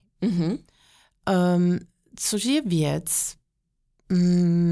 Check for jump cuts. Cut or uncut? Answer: uncut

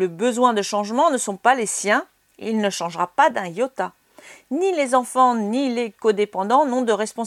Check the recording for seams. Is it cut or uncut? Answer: uncut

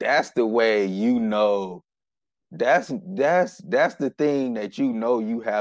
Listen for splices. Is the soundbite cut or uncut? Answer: uncut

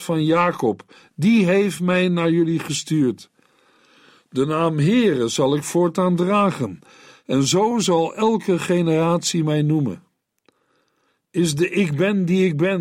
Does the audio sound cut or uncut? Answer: uncut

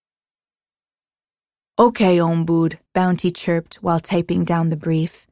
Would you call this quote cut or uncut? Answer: cut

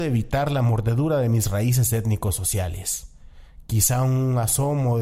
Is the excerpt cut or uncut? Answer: uncut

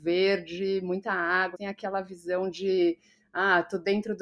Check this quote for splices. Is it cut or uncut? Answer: cut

